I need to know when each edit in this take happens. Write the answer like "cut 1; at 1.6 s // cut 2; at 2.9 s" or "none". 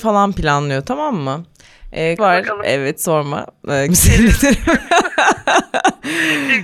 cut 1; at 2.2 s // cut 2; at 3.9 s